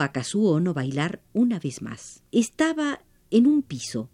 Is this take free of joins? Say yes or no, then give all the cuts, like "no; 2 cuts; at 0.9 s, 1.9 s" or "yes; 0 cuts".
no; 2 cuts; at 1.3 s, 2.3 s